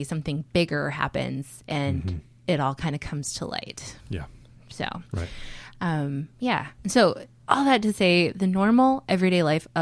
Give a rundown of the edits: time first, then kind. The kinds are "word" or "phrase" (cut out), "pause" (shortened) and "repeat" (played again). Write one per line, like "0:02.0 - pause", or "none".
none